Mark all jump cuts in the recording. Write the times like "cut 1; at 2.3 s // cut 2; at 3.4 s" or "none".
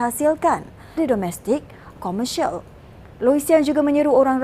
cut 1; at 1.0 s // cut 2; at 2.0 s